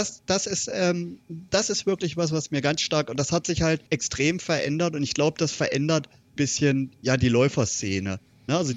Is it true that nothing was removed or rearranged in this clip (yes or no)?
no